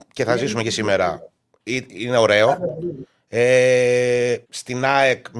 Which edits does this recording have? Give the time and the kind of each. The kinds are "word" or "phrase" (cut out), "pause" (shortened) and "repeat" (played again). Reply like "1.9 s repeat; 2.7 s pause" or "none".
4.4 s word